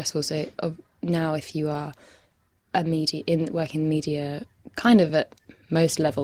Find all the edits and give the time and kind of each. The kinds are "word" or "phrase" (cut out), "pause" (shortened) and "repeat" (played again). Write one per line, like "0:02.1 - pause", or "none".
none